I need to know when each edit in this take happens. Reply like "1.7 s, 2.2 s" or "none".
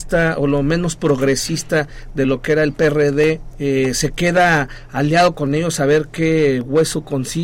none